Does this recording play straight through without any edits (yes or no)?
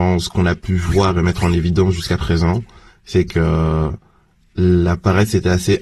yes